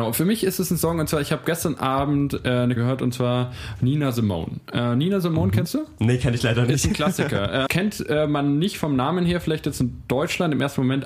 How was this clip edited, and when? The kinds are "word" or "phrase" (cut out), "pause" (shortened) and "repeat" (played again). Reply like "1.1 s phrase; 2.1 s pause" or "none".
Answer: 2.8 s word; 7.7 s word